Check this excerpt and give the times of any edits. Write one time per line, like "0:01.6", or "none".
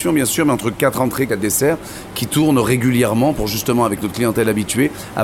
0:01.3